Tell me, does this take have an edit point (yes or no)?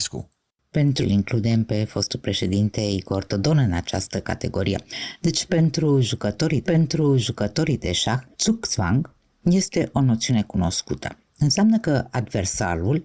yes